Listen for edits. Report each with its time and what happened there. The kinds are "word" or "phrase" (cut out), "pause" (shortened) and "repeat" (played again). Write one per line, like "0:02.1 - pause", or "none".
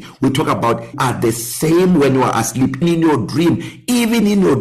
0:00.9 - word
0:02.8 - word